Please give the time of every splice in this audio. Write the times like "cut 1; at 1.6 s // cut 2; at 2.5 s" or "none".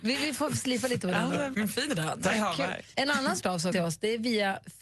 cut 1; at 1.5 s // cut 2; at 1.9 s // cut 3; at 2.9 s // cut 4; at 3.4 s // cut 5; at 3.7 s